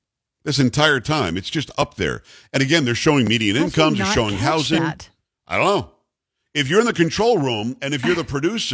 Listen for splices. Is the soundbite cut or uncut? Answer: uncut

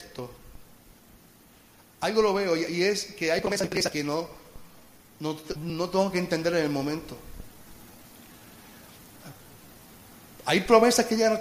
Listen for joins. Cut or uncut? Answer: cut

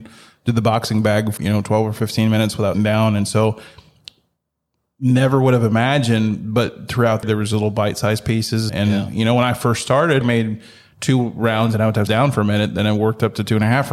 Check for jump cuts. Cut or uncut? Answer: cut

